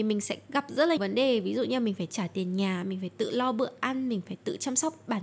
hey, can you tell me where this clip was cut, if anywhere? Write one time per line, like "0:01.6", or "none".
0:01.0
0:02.1